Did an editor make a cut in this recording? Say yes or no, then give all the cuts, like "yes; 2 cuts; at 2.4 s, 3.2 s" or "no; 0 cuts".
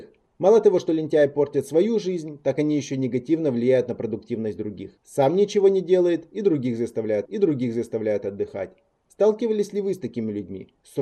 yes; 2 cuts; at 5.0 s, 7.3 s